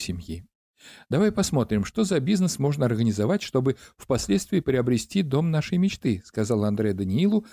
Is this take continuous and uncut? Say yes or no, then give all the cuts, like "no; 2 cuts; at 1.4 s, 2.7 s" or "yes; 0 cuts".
yes; 0 cuts